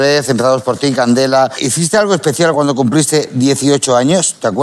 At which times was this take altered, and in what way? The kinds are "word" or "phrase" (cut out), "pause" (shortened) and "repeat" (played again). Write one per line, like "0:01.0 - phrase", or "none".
none